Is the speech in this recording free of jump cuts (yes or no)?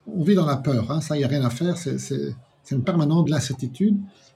no